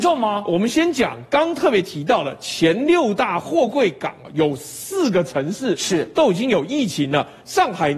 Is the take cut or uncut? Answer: uncut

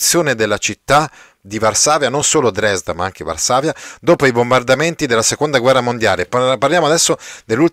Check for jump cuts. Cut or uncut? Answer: uncut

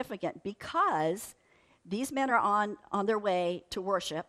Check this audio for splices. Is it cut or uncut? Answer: uncut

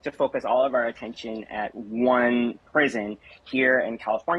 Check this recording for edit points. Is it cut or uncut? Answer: uncut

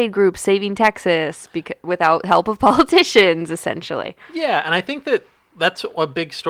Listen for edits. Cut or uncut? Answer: uncut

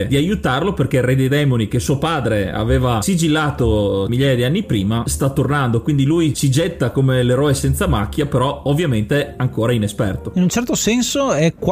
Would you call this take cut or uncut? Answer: uncut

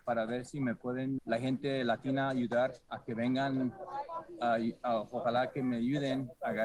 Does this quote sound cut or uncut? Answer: cut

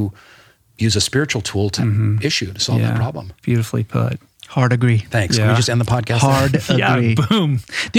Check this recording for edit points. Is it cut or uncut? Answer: cut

